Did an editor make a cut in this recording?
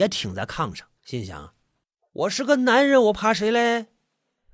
yes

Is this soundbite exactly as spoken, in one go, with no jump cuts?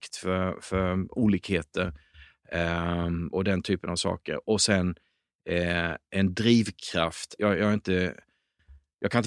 no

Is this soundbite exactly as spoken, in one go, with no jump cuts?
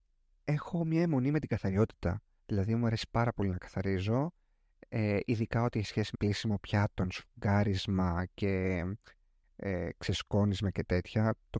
no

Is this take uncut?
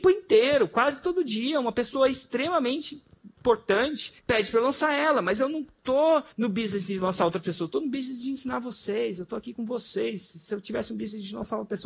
no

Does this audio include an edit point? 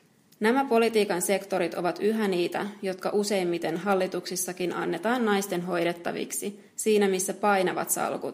yes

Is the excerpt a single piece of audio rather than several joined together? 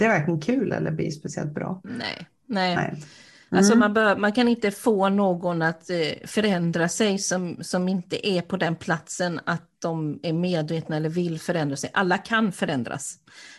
yes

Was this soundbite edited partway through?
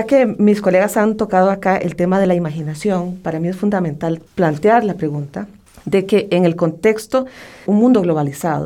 yes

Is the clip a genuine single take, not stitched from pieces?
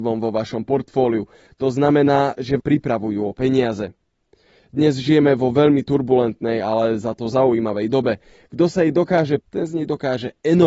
no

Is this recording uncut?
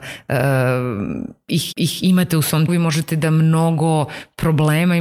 no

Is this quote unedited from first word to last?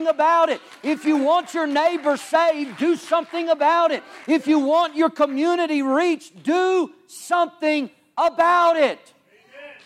yes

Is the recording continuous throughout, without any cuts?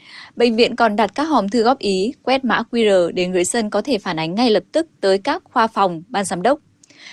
no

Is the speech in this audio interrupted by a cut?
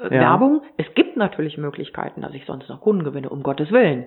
no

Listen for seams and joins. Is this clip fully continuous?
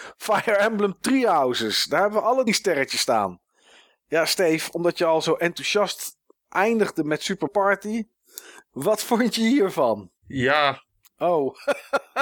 no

